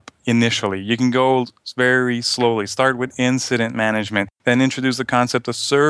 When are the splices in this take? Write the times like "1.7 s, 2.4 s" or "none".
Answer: 4.4 s